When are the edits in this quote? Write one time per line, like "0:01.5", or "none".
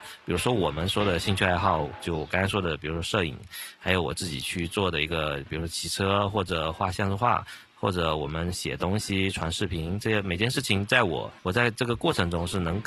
0:11.4